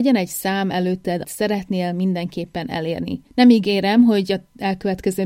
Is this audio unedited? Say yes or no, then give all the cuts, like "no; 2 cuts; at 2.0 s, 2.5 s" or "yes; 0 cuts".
no; 2 cuts; at 1.2 s, 3.3 s